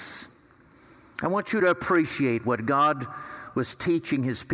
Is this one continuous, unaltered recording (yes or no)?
yes